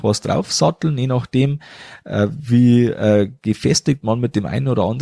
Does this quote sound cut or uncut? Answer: uncut